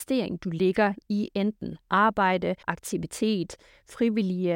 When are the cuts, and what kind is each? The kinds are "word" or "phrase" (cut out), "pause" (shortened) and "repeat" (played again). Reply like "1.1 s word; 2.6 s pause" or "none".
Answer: 2.6 s pause